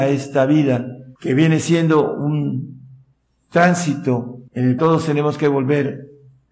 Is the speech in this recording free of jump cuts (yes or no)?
no